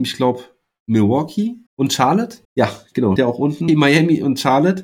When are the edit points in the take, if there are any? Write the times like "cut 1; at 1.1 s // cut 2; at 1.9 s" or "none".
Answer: cut 1; at 1.7 s // cut 2; at 2.4 s // cut 3; at 3.2 s // cut 4; at 3.7 s